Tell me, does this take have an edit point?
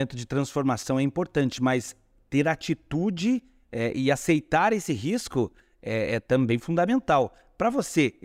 no; 0 cuts

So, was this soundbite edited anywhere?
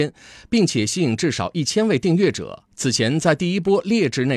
yes; 1 cut; at 2.7 s

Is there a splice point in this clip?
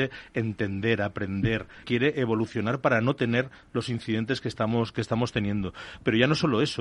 yes; 1 cut; at 1.8 s

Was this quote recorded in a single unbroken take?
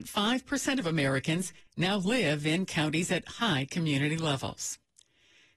yes; 0 cuts

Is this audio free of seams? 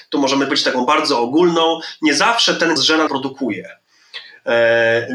no; 2 cuts; at 2.8 s, 3.1 s

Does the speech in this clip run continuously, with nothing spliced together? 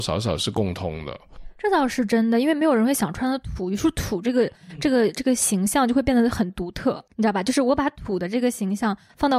no; 1 cut; at 7.1 s

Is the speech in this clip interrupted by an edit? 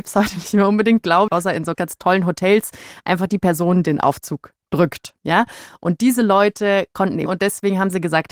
yes; 4 cuts; at 1.3 s, 1.7 s, 3.8 s, 7.3 s

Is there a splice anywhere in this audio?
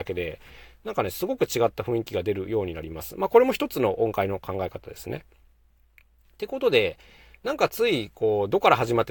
no; 0 cuts

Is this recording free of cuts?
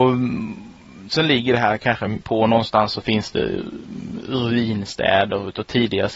no; 1 cut; at 2.2 s

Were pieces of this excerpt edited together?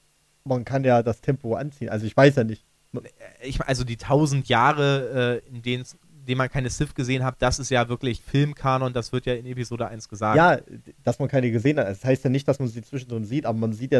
no; 0 cuts

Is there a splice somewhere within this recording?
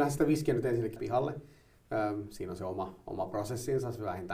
yes; 1 cut; at 1.0 s

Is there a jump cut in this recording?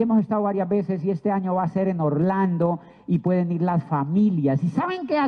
no; 0 cuts

